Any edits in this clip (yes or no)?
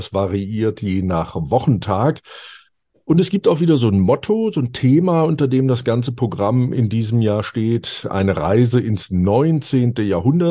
no